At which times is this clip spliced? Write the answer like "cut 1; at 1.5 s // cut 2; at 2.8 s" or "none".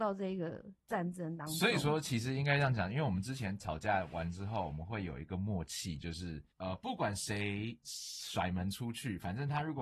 cut 1; at 6.5 s